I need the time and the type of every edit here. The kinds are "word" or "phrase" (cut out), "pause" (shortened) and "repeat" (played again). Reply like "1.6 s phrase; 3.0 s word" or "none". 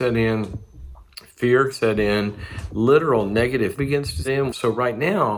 1.7 s word; 3.8 s word; 4.2 s word

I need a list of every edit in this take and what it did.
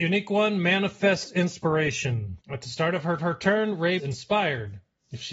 2.4 s pause; 3.2 s repeat; 4.0 s word

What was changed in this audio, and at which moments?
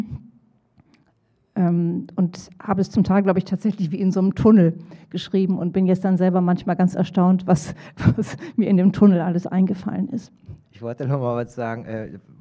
10.6 s pause

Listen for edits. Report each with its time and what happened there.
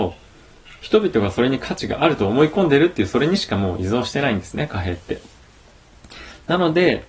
none

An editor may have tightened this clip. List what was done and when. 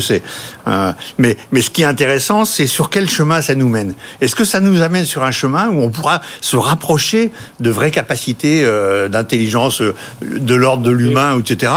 none

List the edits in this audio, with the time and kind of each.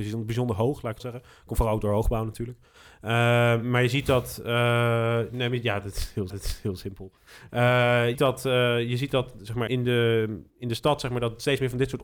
1.0 s phrase; 6.3 s repeat; 8.1 s word; 9.7 s word; 10.5 s pause

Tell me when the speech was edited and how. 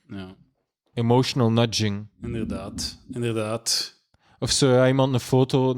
none

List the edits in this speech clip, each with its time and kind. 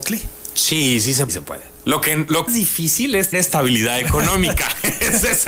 1.3 s phrase; 2.5 s phrase; 3.3 s word

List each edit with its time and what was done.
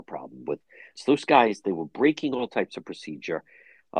1.0 s word

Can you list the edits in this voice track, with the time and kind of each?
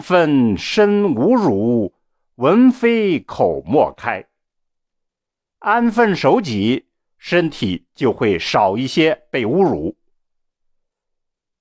none

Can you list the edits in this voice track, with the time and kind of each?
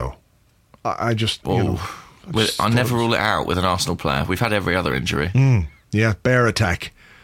none

